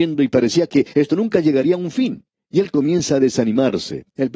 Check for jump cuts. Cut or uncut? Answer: cut